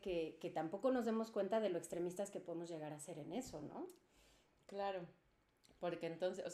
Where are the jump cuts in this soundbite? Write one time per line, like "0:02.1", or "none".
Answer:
none